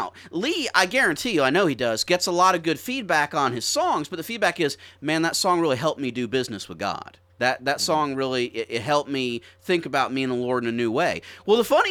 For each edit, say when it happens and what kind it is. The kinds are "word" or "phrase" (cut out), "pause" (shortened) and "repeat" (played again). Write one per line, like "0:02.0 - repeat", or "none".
0:07.3 - pause